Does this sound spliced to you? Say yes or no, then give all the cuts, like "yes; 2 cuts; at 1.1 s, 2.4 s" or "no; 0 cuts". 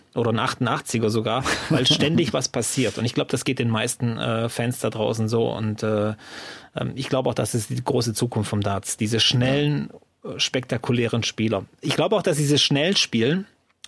no; 0 cuts